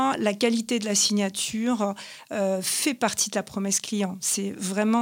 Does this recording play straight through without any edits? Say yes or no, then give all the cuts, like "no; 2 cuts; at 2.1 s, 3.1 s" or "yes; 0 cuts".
yes; 0 cuts